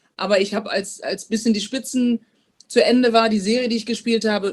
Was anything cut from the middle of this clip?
no; 0 cuts

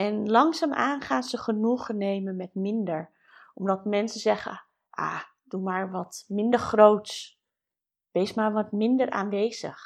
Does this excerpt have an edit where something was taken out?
no; 0 cuts

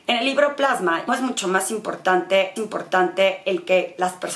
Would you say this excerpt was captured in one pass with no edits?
no; 2 cuts; at 1.1 s, 2.6 s

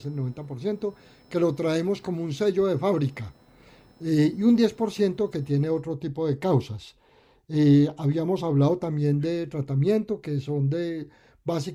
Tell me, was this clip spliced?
no; 0 cuts

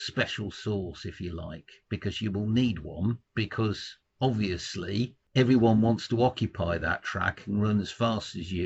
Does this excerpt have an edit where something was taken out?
no; 0 cuts

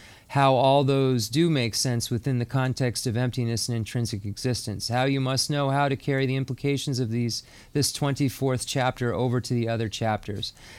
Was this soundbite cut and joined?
no; 0 cuts

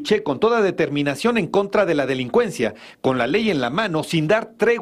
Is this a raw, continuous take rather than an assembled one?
yes; 0 cuts

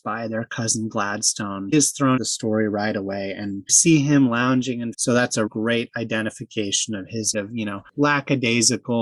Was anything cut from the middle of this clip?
yes; 6 cuts; at 1.7 s, 2.2 s, 3.7 s, 4.9 s, 5.5 s, 7.3 s

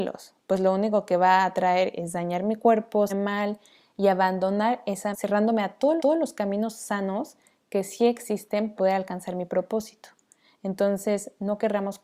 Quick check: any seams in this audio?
yes; 4 cuts; at 3.1 s, 5.1 s, 6.0 s, 8.8 s

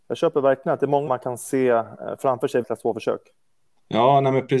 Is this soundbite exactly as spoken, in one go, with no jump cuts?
no; 2 cuts; at 1.1 s, 2.6 s

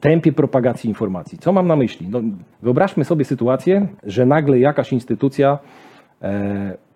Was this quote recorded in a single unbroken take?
no; 2 cuts; at 2.5 s, 4.0 s

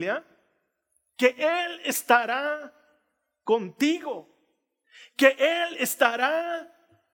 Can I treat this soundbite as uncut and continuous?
yes; 0 cuts

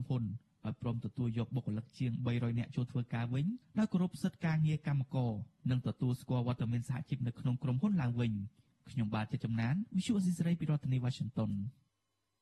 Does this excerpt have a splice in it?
yes; 1 cut; at 3.6 s

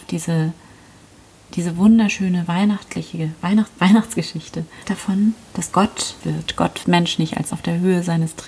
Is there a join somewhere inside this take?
yes; 5 cuts; at 3.8 s, 4.8 s, 6.2 s, 6.8 s, 7.5 s

